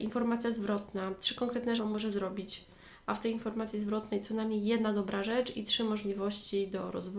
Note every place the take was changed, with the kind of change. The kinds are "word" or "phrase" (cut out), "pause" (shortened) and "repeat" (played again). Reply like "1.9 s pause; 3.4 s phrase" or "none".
1.8 s phrase